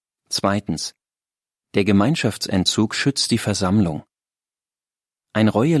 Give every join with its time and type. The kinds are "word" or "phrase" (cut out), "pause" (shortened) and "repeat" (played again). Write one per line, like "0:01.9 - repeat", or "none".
none